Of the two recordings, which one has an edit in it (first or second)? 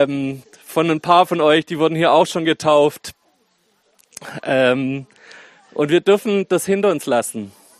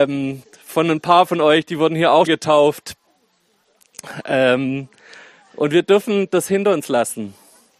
second